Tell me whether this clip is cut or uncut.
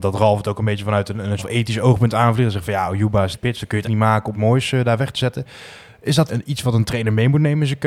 cut